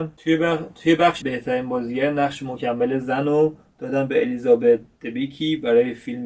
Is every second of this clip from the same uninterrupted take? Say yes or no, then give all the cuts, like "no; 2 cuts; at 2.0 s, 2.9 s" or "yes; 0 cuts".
no; 1 cut; at 1.2 s